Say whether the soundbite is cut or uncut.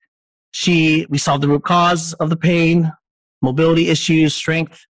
uncut